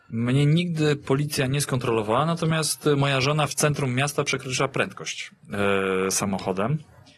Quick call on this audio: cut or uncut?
uncut